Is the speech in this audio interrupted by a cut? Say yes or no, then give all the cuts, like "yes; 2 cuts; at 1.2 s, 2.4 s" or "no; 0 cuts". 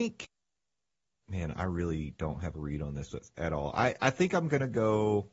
no; 0 cuts